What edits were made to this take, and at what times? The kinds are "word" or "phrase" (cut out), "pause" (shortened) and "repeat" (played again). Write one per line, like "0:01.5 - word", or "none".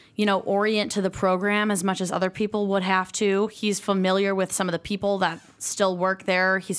none